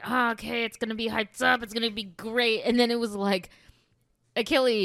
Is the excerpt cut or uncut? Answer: uncut